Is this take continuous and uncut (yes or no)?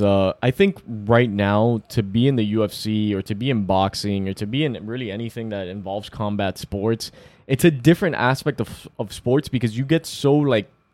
yes